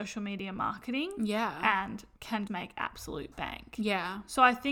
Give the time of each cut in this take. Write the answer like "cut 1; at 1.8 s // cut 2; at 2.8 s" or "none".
cut 1; at 2.2 s // cut 2; at 2.5 s